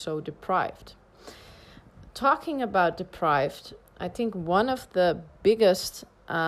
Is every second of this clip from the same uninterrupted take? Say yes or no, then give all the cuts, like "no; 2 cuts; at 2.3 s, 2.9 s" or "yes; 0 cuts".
yes; 0 cuts